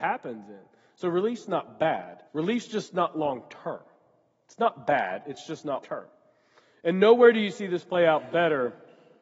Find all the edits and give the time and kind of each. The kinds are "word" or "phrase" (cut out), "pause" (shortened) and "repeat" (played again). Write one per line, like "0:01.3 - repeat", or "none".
0:02.3 - pause
0:05.8 - word